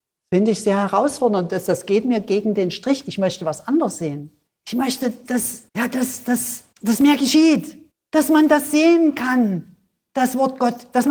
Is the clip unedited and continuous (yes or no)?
no